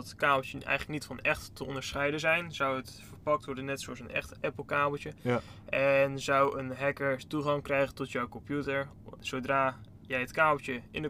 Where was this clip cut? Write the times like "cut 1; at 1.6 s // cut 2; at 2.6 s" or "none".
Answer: none